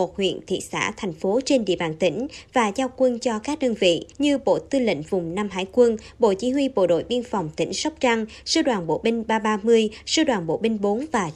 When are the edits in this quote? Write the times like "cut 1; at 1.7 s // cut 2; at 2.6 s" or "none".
cut 1; at 4.1 s